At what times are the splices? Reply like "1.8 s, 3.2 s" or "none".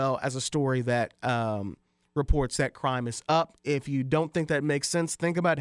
none